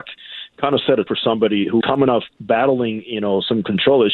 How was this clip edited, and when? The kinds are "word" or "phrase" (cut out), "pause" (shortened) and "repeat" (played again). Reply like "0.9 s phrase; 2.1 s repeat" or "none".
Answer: 1.1 s word; 1.8 s word

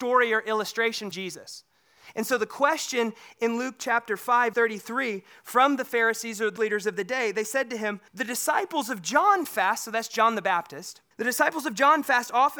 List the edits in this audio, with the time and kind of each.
1.1 s word; 4.5 s word; 6.6 s word; 8.1 s pause; 11.1 s pause

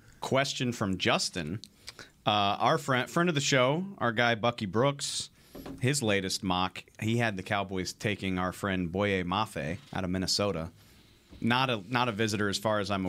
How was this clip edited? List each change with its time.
9.9 s pause

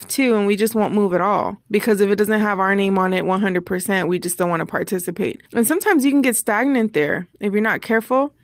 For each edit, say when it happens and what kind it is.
1.6 s pause; 5.5 s pause

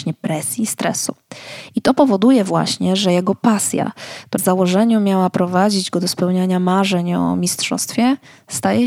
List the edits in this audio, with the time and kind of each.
4.4 s word

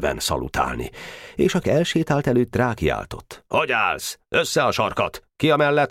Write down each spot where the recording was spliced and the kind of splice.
1.6 s word; 2.5 s word

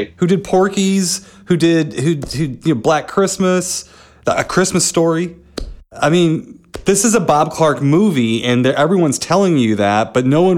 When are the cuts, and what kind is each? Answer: none

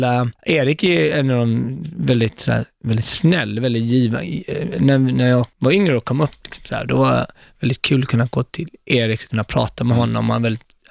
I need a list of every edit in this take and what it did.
none

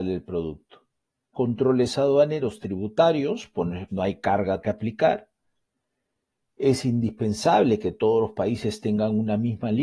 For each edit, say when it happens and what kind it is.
1.3 s phrase; 3.9 s word; 4.6 s word

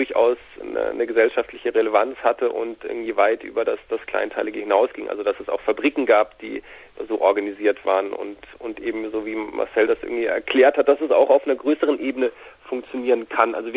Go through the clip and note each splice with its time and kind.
none

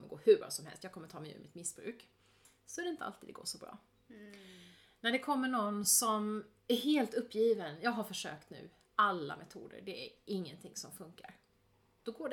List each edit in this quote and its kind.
none

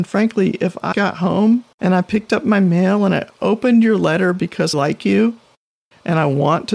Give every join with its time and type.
0.9 s word; 1.7 s pause; 4.7 s phrase

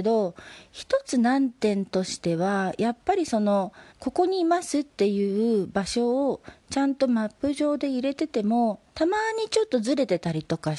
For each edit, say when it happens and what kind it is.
3.9 s pause; 8.9 s pause

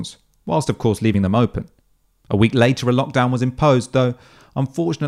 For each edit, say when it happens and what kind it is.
none

